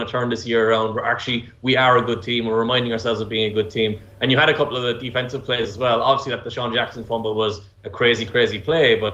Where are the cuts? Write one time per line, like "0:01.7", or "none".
none